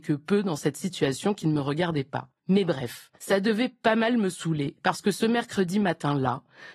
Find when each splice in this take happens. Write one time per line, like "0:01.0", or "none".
0:02.4
0:03.2